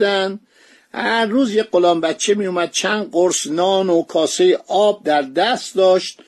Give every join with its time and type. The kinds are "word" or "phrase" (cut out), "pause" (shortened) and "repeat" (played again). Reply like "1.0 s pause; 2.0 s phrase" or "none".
none